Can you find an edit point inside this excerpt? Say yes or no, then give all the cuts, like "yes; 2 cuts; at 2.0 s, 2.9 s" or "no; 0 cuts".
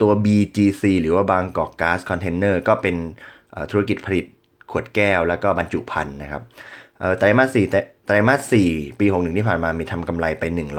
no; 0 cuts